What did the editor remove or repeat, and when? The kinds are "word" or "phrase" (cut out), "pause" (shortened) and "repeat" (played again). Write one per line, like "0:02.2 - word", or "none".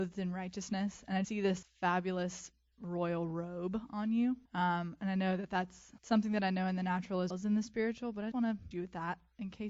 0:01.2 - word
0:01.6 - word
0:04.5 - pause
0:06.0 - pause
0:07.3 - word
0:08.3 - word
0:08.7 - word